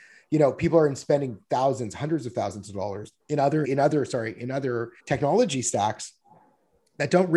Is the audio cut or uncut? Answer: cut